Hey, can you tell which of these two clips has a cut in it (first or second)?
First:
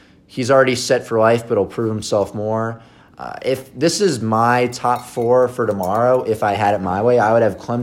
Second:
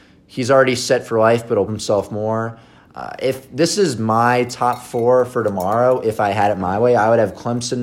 second